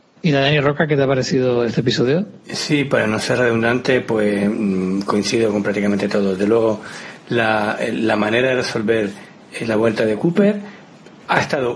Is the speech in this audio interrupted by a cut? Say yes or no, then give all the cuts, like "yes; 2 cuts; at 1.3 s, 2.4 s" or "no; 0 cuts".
no; 0 cuts